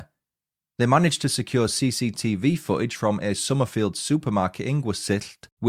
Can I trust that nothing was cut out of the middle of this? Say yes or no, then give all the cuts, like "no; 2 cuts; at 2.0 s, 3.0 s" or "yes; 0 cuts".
yes; 0 cuts